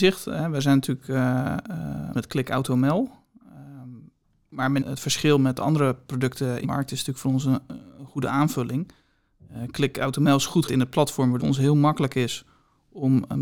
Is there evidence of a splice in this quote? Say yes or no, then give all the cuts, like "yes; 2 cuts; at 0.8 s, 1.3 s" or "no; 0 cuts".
yes; 5 cuts; at 2.1 s, 4.8 s, 6.6 s, 10.7 s, 11.4 s